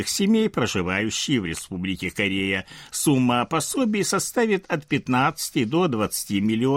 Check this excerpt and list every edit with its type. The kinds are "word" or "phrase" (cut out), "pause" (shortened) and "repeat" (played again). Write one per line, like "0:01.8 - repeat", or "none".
none